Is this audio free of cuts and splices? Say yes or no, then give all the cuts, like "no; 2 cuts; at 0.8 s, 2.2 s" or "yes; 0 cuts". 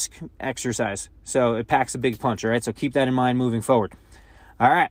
yes; 0 cuts